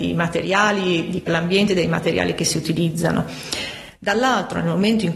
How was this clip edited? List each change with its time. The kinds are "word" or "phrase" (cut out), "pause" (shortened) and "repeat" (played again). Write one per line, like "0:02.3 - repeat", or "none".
0:01.3 - phrase